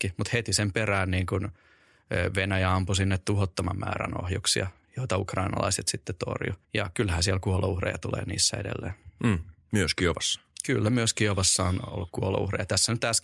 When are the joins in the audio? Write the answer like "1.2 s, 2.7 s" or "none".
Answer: 6.6 s

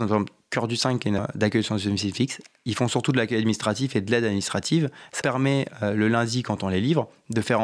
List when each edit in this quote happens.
1.2 s, 5.2 s

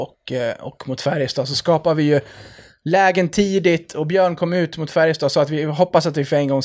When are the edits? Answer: none

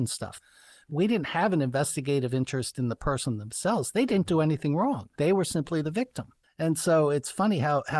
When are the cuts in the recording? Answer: 6.4 s

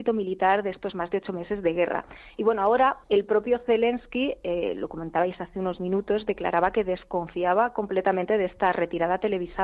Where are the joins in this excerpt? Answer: 3.0 s

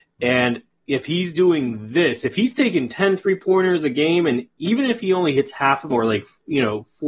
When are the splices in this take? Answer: 5.9 s

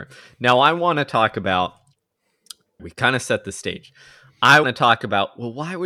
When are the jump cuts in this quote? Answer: 2.8 s, 4.6 s

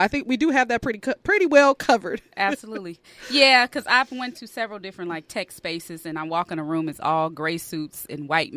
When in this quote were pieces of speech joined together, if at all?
none

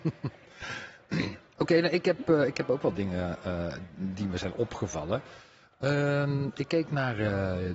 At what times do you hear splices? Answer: none

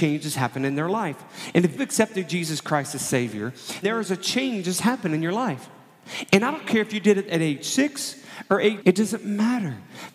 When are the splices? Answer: 1.8 s, 3.8 s, 8.8 s

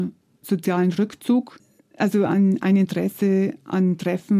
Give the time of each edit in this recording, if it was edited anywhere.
none

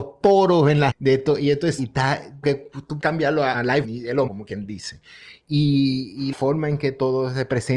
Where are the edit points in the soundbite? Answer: 0.9 s, 1.8 s, 2.4 s, 3.0 s, 3.5 s, 3.8 s, 4.3 s, 6.3 s

